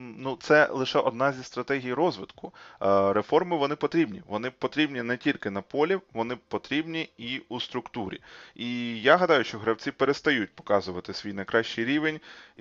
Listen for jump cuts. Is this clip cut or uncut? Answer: uncut